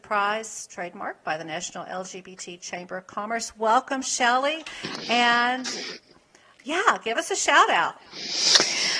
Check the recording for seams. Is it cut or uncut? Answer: uncut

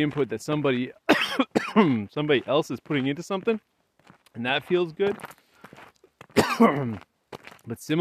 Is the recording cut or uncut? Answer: uncut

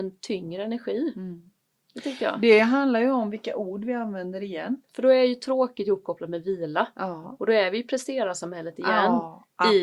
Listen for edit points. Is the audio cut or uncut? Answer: uncut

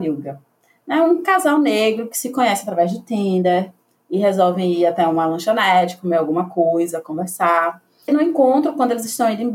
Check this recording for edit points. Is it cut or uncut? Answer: uncut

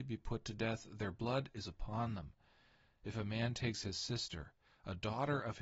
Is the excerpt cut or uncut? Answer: uncut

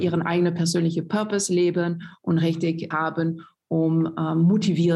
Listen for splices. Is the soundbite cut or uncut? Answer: cut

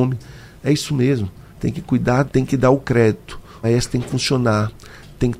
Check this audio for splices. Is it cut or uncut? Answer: cut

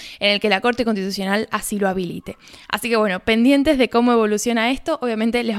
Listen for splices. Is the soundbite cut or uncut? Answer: uncut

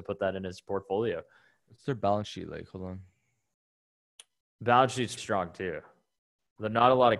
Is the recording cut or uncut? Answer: cut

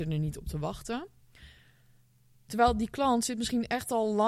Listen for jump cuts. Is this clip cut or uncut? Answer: uncut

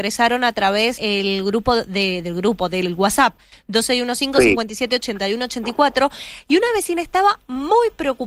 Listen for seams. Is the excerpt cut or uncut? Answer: cut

